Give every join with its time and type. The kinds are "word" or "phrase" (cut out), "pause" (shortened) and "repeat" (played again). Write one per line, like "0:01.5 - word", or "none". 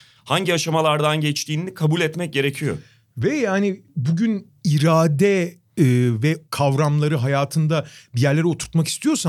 0:06.5 - phrase